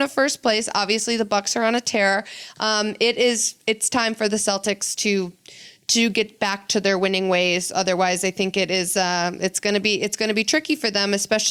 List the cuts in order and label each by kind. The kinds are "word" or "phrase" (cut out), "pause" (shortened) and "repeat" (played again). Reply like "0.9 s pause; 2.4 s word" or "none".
none